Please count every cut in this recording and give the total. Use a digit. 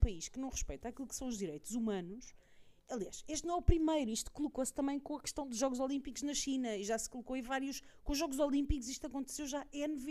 1